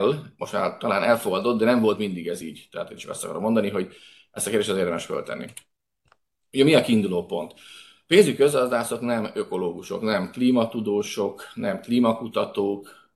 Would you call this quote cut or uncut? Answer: uncut